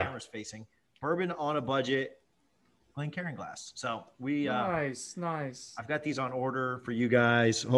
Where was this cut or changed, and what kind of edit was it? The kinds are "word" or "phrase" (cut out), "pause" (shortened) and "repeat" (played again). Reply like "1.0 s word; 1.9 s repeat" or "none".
none